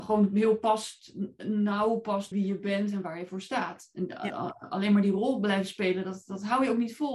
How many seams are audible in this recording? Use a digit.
1